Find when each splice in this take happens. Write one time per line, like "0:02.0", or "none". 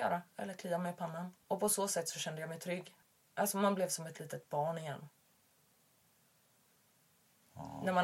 0:01.4
0:03.0